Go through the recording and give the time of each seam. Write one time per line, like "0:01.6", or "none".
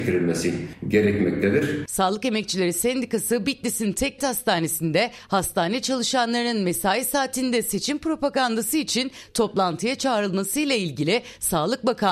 0:04.2